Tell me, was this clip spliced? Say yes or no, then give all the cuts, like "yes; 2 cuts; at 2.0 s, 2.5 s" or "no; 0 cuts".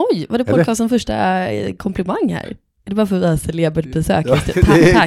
no; 0 cuts